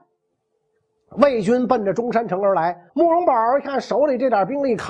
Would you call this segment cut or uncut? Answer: cut